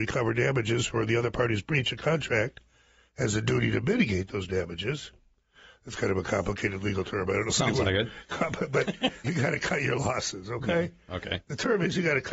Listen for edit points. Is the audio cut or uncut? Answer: cut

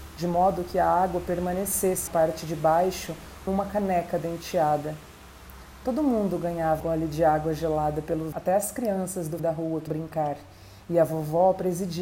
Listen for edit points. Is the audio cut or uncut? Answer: cut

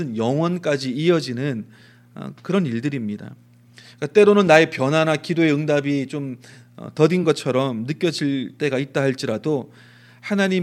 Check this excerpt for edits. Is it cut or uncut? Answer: uncut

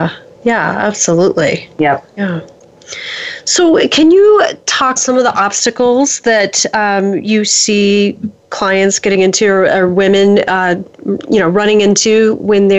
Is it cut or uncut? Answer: cut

